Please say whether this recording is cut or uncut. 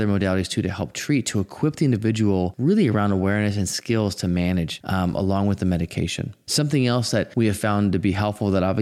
uncut